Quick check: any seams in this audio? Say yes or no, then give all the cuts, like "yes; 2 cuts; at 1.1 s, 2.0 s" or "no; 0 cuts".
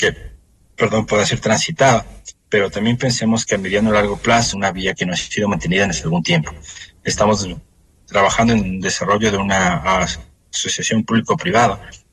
yes; 1 cut; at 4.5 s